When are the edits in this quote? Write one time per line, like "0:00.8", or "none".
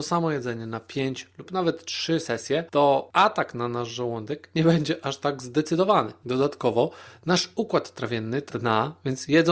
0:08.5